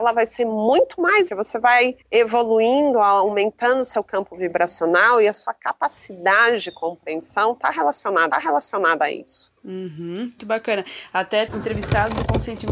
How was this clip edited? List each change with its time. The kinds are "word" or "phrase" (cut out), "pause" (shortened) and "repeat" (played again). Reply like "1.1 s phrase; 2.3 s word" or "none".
1.3 s phrase; 2.0 s pause; 8.3 s repeat; 10.4 s word; 11.5 s word